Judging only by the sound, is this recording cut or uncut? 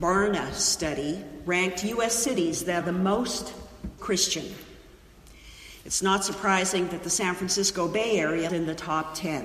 cut